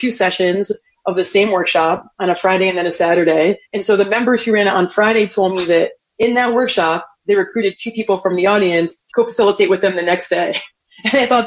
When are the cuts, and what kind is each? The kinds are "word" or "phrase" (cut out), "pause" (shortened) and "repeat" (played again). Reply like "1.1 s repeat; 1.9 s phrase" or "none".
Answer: 2.1 s pause; 3.7 s pause; 9.1 s word